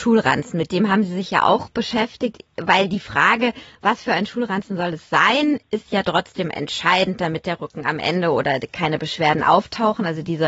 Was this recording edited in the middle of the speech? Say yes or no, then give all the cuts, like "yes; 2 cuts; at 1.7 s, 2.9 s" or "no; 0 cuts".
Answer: no; 0 cuts